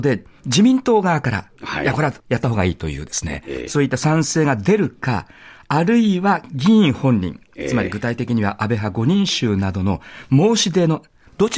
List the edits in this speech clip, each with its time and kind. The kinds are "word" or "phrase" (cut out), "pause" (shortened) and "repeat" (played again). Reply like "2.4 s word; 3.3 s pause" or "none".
2.2 s pause